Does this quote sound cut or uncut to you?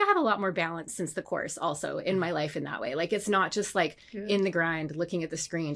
uncut